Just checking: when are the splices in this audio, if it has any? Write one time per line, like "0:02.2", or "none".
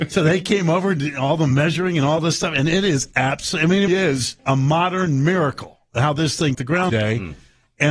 0:03.9
0:04.4
0:06.5
0:06.9